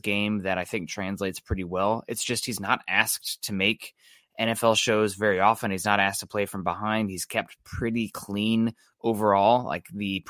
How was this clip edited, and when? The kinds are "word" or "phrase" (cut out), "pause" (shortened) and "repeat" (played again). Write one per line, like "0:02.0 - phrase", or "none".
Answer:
none